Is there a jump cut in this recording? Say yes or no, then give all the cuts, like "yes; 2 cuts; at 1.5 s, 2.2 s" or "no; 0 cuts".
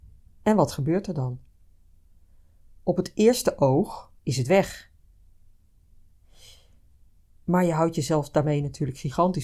no; 0 cuts